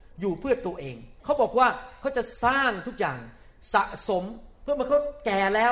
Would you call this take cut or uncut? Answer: cut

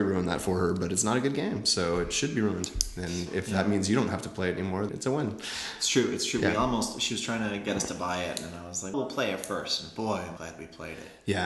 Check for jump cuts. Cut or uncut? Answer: cut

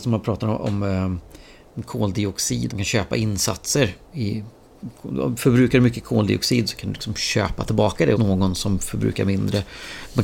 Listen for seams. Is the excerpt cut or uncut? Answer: cut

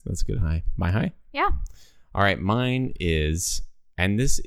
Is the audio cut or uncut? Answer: uncut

